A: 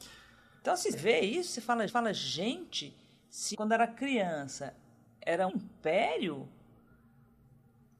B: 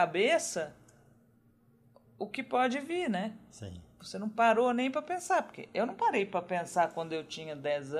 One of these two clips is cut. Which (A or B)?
A